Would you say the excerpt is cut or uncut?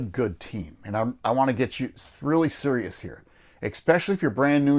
uncut